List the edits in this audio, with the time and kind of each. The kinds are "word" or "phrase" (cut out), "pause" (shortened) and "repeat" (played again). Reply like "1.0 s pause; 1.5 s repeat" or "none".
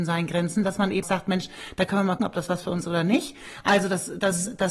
1.0 s word; 2.2 s word; 2.8 s word